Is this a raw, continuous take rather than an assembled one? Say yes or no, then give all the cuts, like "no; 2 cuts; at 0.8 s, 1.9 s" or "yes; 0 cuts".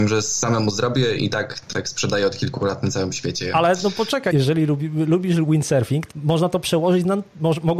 no; 4 cuts; at 1.2 s, 1.6 s, 4.3 s, 6.1 s